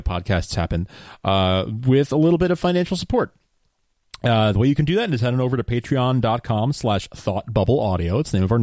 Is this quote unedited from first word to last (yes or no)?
yes